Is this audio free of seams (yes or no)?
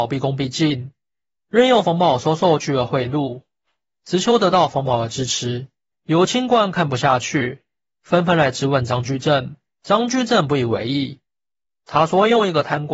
yes